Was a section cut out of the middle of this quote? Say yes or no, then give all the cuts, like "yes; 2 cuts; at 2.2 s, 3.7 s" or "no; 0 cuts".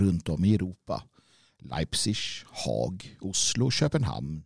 no; 0 cuts